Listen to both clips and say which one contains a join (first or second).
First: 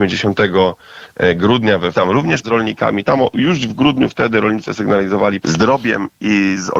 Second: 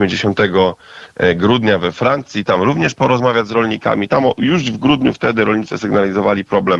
first